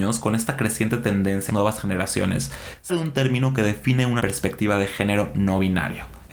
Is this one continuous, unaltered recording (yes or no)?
no